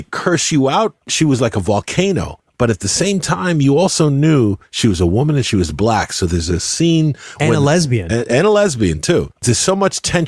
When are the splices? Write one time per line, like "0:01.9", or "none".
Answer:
0:01.0
0:09.4